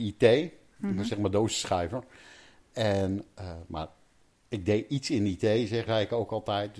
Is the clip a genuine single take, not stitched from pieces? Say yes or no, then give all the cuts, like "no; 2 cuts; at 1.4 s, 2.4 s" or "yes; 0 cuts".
no; 1 cut; at 5.9 s